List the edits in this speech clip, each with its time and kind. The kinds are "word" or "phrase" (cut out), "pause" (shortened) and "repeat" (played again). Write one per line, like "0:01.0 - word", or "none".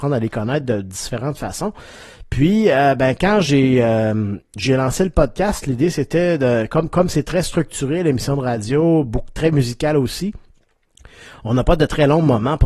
none